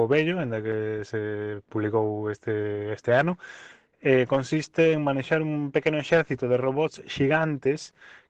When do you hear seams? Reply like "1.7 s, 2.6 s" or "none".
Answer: none